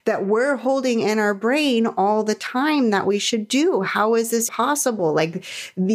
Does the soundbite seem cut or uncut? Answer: cut